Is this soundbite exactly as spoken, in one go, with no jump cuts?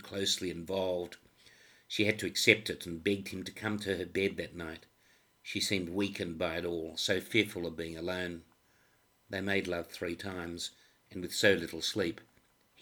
yes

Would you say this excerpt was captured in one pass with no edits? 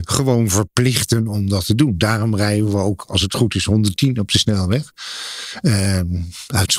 yes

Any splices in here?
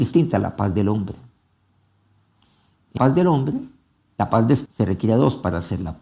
yes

